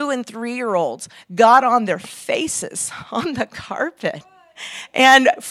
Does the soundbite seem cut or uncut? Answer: uncut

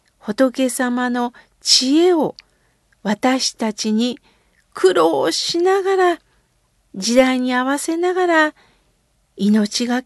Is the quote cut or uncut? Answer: uncut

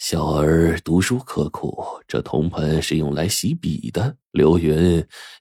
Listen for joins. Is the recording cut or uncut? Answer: cut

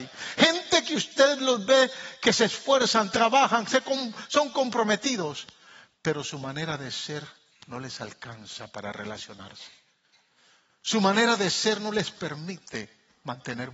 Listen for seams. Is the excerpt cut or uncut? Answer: uncut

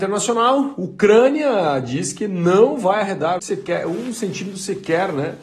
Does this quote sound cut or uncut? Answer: cut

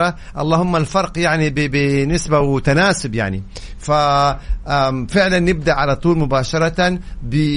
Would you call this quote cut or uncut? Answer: uncut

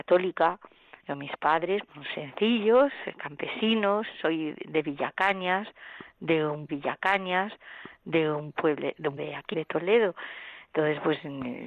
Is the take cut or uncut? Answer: cut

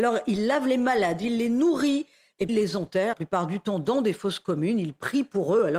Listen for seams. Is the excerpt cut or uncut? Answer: cut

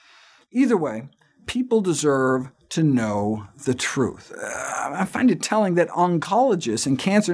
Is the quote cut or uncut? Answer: uncut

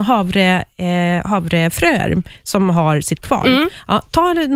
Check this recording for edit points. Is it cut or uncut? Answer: cut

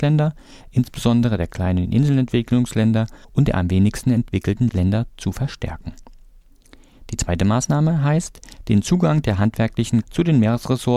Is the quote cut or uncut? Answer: cut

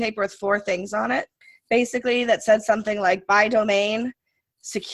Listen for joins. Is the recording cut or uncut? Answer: cut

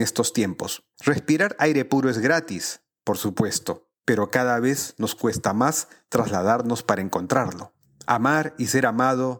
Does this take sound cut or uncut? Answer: cut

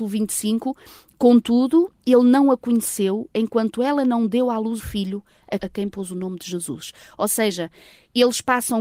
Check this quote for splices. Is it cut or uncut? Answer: cut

